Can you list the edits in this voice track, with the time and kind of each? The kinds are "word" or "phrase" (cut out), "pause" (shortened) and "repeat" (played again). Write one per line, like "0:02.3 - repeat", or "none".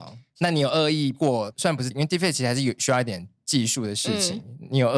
0:01.1 - word
0:01.9 - word